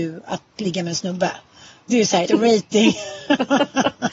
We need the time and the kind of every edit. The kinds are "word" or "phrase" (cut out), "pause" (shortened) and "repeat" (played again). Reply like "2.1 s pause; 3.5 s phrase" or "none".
2.3 s word